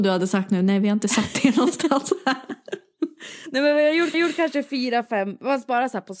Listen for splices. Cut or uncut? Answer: cut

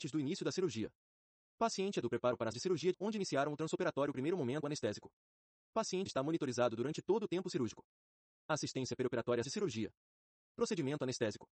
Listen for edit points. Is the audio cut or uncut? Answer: cut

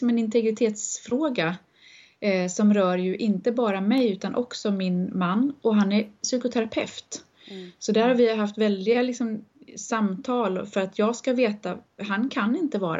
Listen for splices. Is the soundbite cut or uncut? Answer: uncut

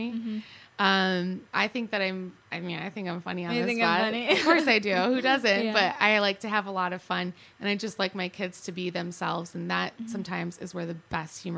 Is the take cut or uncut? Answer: cut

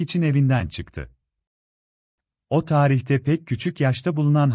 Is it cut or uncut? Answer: uncut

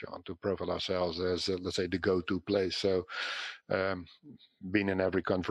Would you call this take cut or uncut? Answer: uncut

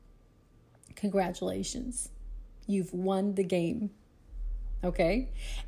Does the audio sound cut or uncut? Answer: uncut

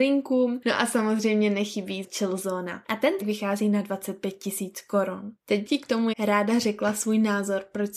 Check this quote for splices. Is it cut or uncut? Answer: cut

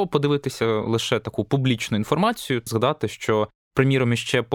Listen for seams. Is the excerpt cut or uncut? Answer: cut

